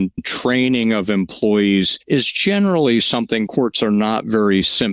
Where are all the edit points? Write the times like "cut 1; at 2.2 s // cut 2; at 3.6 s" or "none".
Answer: cut 1; at 2.0 s // cut 2; at 3.5 s